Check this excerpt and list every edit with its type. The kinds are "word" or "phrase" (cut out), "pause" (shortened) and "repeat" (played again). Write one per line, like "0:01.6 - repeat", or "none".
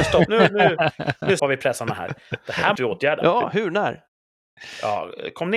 0:01.4 - word
0:02.8 - word